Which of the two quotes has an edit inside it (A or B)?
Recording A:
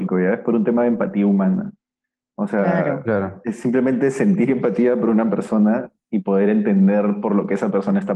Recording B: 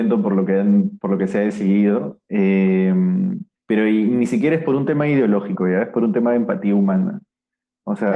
B